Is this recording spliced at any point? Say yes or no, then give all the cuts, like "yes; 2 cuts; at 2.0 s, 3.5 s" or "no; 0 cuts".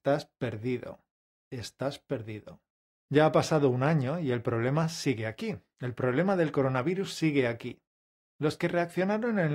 no; 0 cuts